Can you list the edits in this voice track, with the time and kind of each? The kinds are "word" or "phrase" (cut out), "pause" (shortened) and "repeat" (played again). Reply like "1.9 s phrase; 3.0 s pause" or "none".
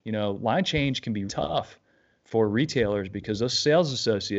1.3 s word